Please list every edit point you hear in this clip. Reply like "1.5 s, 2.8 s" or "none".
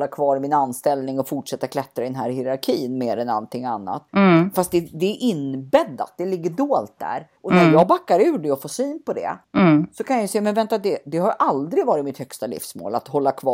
4.1 s, 7.4 s, 9.4 s